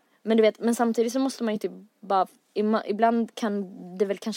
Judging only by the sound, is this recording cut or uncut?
uncut